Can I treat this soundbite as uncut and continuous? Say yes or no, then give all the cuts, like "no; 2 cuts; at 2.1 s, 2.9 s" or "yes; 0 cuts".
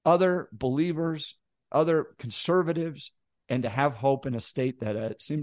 yes; 0 cuts